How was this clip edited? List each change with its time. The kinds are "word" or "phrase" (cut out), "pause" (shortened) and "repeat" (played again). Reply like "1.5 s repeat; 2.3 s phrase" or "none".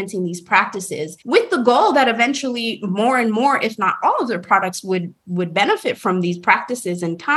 1.2 s pause